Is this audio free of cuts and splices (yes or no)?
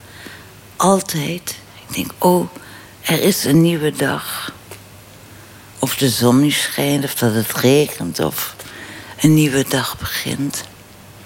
yes